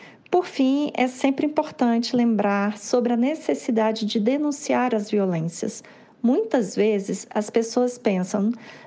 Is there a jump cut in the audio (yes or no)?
no